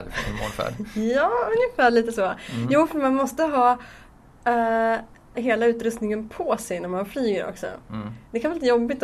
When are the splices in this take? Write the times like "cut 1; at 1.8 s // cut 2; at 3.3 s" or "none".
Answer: cut 1; at 5.3 s